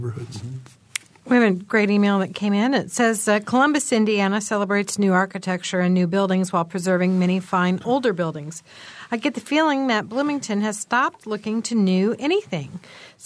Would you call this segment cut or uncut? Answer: uncut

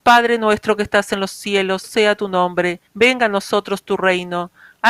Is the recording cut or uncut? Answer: cut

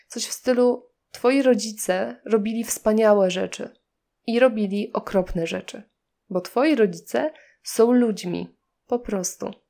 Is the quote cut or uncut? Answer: uncut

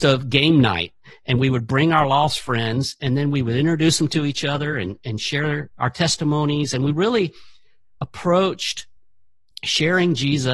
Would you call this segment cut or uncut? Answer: uncut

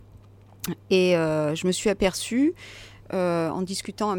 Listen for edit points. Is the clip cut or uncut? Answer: uncut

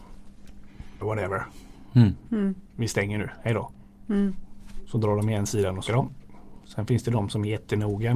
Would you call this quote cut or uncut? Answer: cut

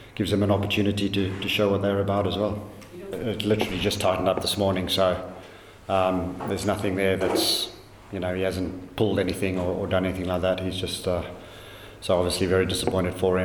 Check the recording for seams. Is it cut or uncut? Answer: uncut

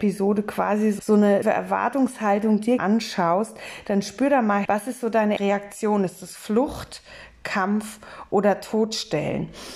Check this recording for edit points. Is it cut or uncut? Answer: cut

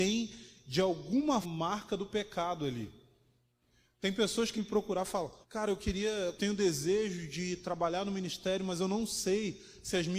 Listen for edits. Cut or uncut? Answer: cut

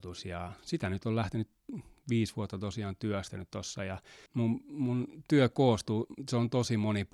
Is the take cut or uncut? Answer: cut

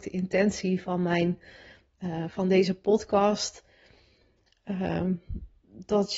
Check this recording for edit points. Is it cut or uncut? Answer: uncut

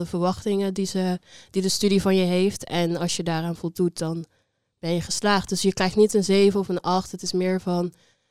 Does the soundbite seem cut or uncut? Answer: uncut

